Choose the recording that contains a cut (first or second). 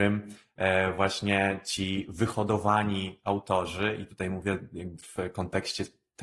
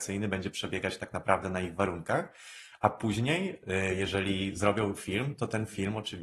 first